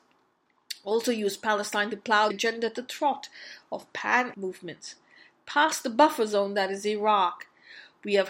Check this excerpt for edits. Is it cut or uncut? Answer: cut